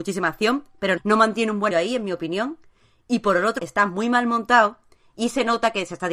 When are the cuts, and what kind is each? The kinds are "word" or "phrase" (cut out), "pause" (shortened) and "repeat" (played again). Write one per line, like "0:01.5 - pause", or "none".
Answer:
0:01.0 - word
0:01.7 - word
0:03.6 - word